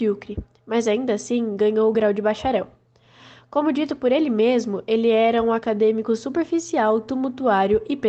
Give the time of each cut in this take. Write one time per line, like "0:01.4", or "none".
none